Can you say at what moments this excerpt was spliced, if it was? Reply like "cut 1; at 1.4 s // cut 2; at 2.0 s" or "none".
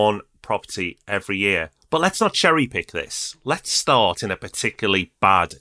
none

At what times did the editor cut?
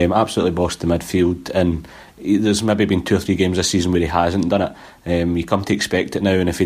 none

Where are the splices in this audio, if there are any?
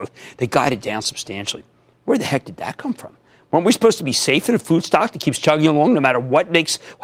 none

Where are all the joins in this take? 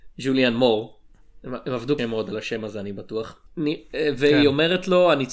cut 1; at 2.0 s // cut 2; at 3.5 s

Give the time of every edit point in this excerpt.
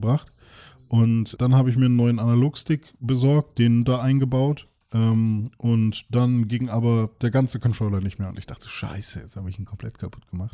cut 1; at 1.4 s

